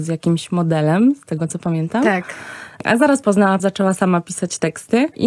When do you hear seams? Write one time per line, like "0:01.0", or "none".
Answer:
0:03.2
0:03.6